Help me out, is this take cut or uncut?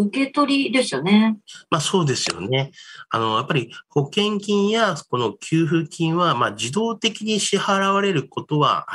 uncut